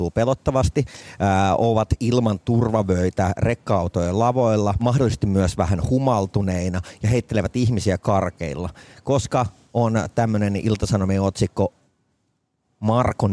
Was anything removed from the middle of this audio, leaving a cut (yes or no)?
yes